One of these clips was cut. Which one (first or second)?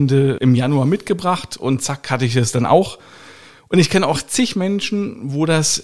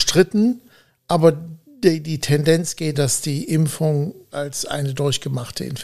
second